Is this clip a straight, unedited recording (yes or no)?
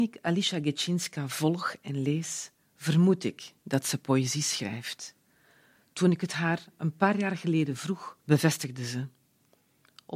no